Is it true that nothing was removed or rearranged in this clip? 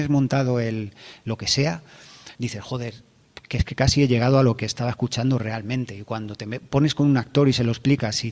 no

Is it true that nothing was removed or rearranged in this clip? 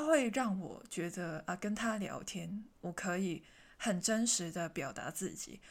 yes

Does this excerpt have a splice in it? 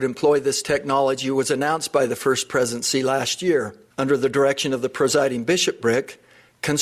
yes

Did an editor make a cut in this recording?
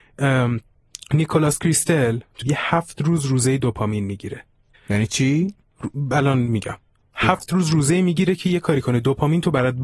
yes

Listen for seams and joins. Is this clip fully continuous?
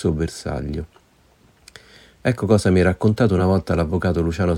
yes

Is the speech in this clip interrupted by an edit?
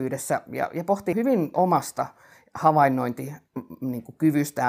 yes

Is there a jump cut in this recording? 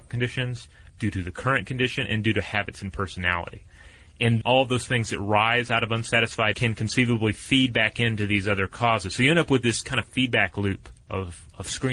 yes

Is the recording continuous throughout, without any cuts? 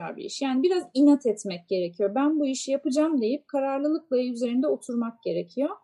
yes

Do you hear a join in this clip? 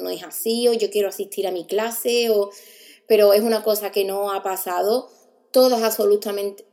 no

